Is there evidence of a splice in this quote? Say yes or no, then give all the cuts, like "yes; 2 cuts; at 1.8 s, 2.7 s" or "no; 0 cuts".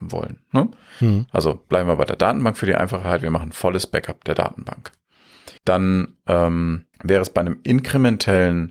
yes; 2 cuts; at 5.6 s, 6.9 s